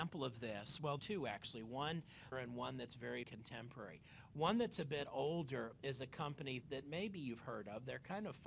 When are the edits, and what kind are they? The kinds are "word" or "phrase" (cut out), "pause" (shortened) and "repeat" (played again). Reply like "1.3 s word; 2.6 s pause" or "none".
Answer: 1.0 s word; 2.3 s phrase; 3.2 s word; 6.6 s word